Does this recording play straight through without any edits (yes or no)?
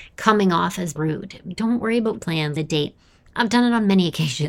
no